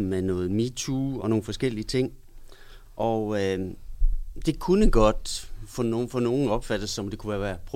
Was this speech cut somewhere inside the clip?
yes; 1 cut; at 1.2 s

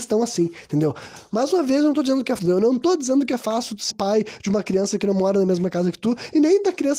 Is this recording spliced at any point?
yes; 2 cuts; at 2.4 s, 3.9 s

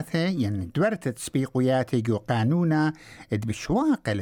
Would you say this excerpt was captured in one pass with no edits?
yes; 0 cuts

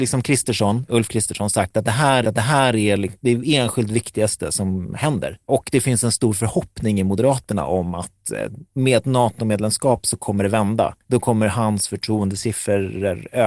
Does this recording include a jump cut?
yes; 2 cuts; at 2.2 s, 11.0 s

